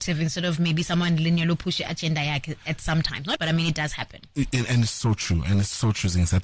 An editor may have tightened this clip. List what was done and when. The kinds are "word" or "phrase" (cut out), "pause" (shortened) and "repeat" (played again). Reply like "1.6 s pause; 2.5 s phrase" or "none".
3.4 s word

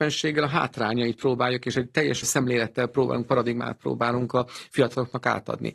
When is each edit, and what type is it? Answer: 2.2 s word

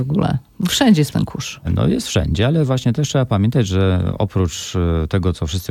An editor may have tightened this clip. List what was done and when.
1.1 s word

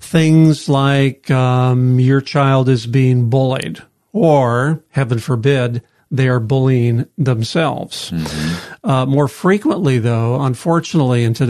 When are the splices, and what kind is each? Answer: none

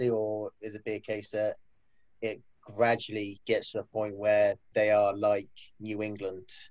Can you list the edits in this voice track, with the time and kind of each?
none

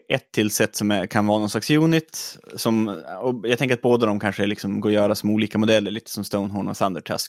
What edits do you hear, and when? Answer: none

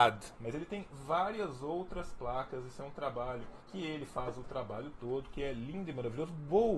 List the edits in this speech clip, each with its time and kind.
3.6 s pause

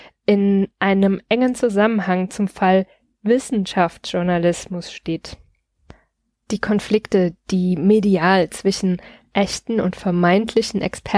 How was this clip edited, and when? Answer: none

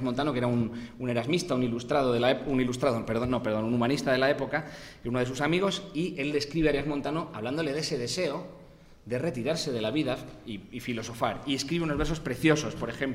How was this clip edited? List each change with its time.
none

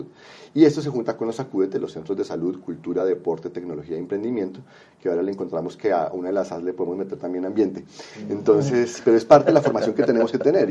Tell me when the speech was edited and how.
none

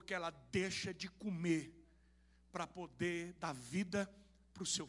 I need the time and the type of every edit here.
none

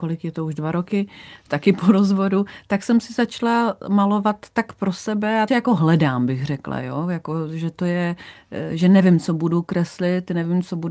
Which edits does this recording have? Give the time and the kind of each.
5.5 s phrase

